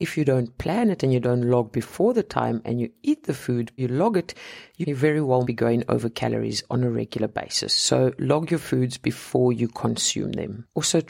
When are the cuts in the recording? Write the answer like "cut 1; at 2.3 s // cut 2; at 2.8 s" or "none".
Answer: cut 1; at 3.8 s // cut 2; at 4.8 s // cut 3; at 5.4 s